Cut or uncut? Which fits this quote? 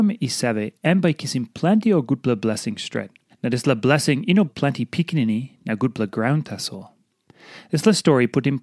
cut